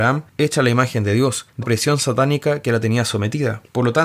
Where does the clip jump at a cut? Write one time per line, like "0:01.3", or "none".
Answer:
0:01.6